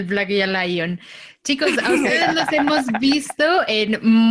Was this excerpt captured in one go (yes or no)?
yes